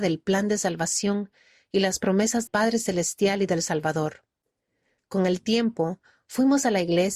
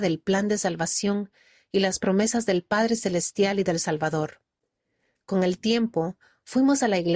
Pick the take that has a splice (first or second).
first